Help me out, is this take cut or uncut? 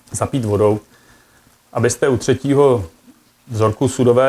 uncut